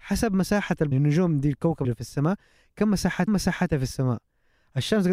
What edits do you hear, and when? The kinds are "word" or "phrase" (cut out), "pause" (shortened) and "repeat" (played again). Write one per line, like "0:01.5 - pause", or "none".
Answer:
0:00.9 - word
0:01.8 - word
0:03.3 - repeat